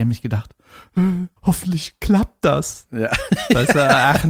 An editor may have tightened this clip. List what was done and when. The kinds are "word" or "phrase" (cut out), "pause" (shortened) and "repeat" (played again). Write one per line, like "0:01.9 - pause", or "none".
0:01.4 - pause